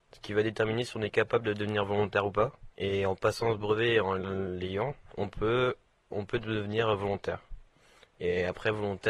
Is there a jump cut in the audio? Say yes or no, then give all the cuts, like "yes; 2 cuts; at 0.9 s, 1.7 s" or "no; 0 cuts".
yes; 1 cut; at 2.7 s